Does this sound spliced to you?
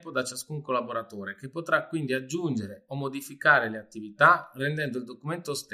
no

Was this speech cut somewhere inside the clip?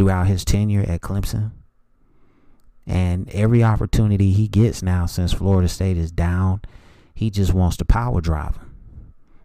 no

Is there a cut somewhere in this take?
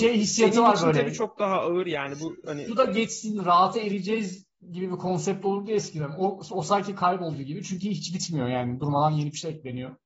yes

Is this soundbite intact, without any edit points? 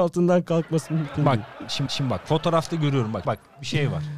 no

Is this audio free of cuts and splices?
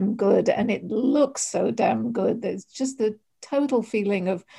yes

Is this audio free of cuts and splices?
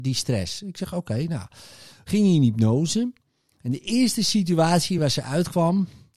yes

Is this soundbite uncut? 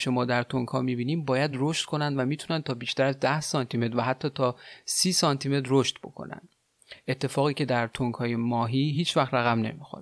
yes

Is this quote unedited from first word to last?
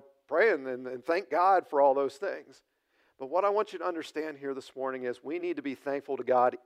yes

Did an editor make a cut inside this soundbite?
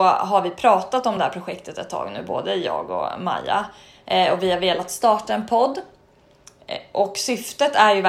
no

